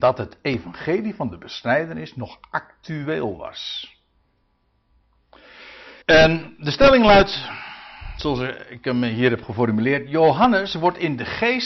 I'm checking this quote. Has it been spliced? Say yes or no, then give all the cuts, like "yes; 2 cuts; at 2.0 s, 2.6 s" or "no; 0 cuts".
yes; 1 cut; at 6.0 s